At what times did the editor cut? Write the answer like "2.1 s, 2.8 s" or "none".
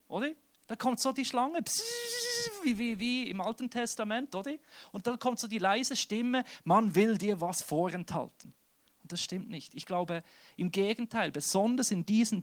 none